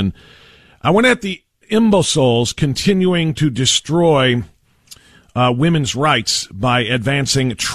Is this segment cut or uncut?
uncut